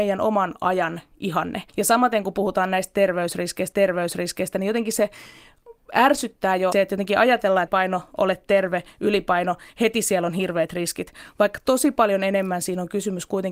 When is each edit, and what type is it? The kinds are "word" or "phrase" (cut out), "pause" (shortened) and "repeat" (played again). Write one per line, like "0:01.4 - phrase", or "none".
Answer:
0:01.7 - pause
0:03.7 - repeat
0:06.7 - phrase
0:07.7 - word